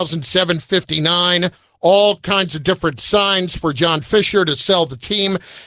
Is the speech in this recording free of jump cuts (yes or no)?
yes